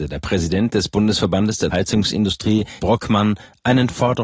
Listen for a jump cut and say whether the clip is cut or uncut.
cut